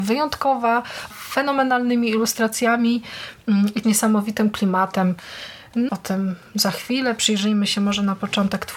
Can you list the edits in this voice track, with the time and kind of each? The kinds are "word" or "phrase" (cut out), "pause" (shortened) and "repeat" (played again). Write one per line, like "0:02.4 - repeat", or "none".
0:01.1 - word
0:03.8 - word
0:05.9 - word